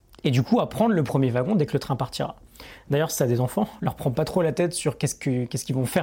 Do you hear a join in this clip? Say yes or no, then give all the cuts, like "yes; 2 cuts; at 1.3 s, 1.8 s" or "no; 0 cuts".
no; 0 cuts